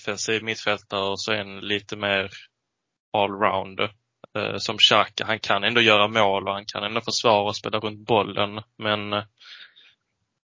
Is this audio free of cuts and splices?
yes; 0 cuts

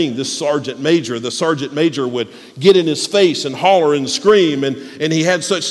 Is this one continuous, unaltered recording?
yes; 0 cuts

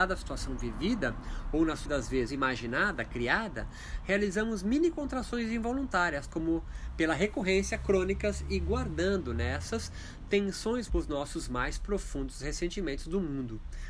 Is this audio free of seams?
no; 4 cuts; at 1.9 s, 2.3 s, 6.3 s, 10.9 s

